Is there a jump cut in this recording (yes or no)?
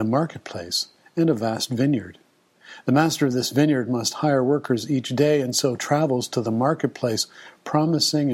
no